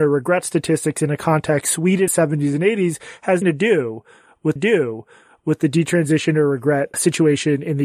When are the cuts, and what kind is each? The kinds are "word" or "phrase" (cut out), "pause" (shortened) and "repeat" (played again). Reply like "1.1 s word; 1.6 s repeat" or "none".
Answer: 1.6 s word; 2.1 s phrase; 3.4 s word; 4.6 s repeat; 6.9 s word